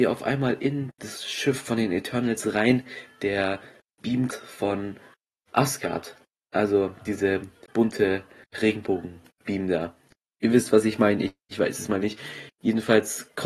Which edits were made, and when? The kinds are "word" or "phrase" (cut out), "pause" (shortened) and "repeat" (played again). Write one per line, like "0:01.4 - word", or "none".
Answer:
0:04.3 - word
0:08.5 - word
0:12.0 - word

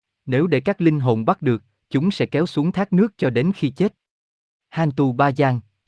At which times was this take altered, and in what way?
none

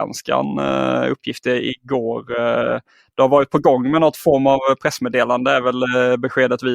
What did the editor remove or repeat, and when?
none

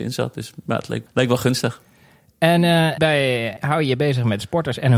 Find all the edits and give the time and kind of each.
0:01.1 - word
0:03.0 - word
0:03.6 - word

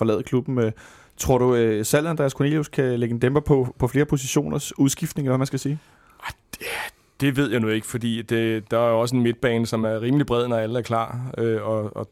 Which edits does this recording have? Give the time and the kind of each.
none

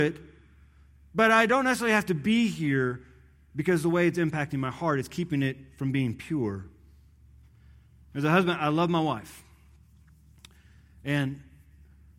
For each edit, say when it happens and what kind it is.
none

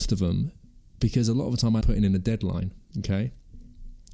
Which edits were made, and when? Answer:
0:01.8 - word
0:02.9 - pause

